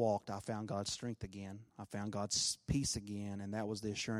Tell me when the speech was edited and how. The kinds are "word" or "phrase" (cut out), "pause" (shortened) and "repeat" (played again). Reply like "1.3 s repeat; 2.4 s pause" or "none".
1.7 s pause